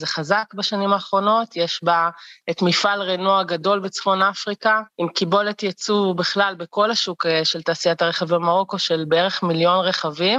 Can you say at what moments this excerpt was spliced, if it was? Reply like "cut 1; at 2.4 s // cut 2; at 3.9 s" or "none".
cut 1; at 4.9 s